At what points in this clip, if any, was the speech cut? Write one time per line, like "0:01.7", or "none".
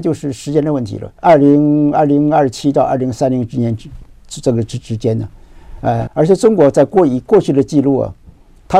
0:01.2
0:06.1

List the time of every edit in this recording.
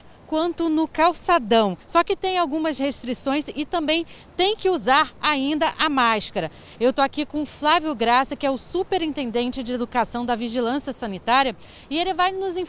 0:01.8

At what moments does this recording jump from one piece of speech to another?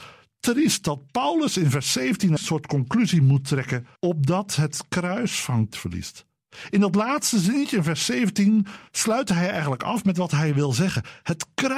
0:02.4
0:04.0
0:05.7
0:08.9

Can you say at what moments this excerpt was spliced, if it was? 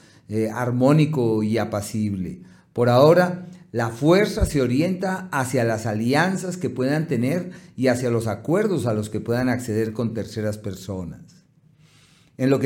none

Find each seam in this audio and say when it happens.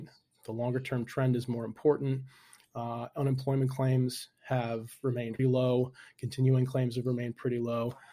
0:05.4

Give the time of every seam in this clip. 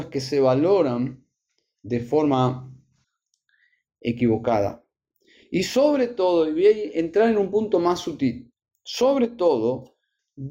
none

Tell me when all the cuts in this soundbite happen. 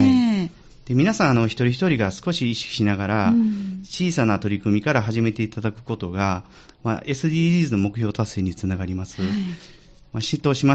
none

